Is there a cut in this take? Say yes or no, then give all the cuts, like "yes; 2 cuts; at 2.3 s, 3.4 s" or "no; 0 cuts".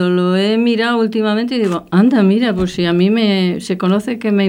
no; 0 cuts